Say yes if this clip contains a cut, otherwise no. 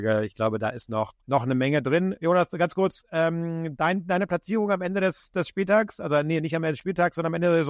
yes